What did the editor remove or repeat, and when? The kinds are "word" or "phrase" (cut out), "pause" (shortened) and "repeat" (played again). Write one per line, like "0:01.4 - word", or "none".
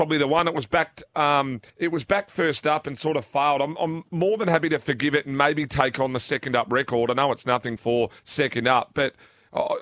0:01.7 - pause
0:07.8 - word
0:08.2 - pause